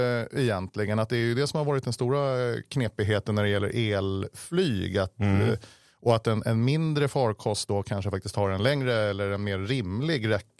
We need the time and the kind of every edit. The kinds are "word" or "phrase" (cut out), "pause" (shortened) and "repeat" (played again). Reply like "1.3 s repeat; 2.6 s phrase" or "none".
none